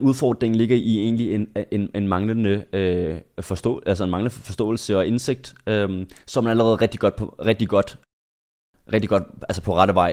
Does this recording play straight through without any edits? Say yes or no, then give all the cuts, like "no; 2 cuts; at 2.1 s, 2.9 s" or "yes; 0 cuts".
yes; 0 cuts